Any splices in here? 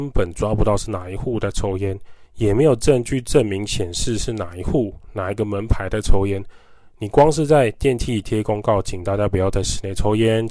no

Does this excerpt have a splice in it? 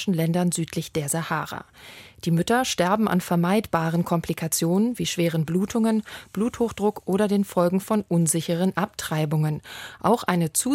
no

